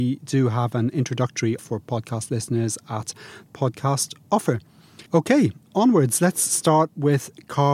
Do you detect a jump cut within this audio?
yes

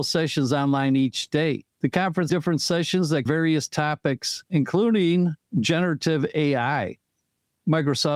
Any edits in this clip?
yes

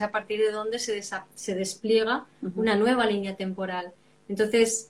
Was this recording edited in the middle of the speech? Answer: no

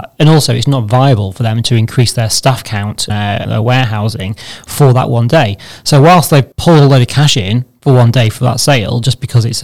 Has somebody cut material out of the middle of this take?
yes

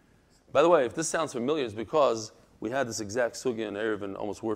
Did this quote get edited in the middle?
no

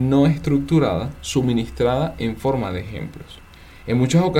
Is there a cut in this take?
no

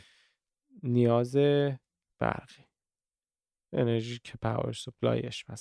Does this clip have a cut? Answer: no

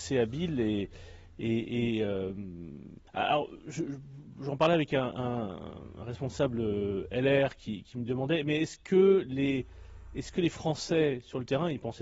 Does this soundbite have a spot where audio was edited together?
yes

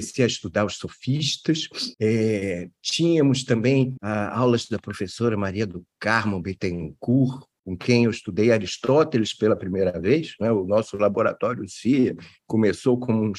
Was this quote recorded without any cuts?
yes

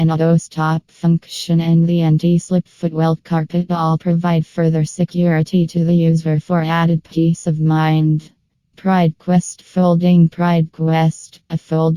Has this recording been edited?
no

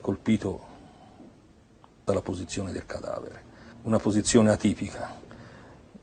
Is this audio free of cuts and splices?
no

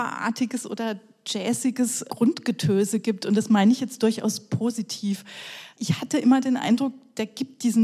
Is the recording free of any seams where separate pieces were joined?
yes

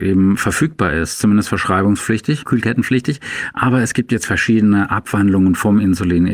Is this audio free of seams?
yes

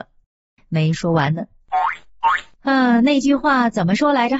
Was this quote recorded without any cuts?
yes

